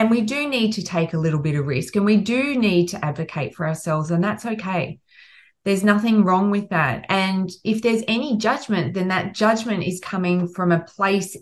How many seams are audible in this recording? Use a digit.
0